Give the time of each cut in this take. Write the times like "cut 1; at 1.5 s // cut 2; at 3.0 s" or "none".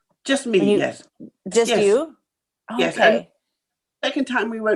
none